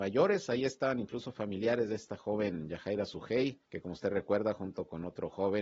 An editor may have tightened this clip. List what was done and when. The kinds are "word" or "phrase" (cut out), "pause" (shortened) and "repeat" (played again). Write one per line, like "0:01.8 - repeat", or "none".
0:03.7 - pause